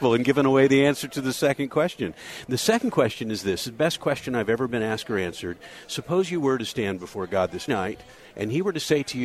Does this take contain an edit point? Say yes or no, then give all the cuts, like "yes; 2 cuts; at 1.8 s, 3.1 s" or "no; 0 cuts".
yes; 1 cut; at 7.7 s